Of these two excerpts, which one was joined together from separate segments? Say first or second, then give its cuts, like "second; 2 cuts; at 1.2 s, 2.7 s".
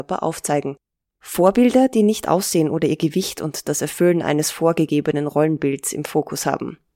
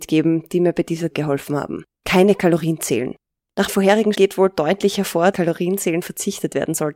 second; 5 cuts; at 1.1 s, 1.9 s, 3.7 s, 4.1 s, 5.3 s